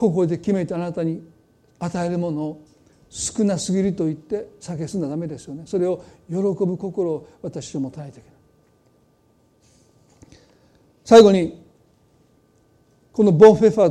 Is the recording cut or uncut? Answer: uncut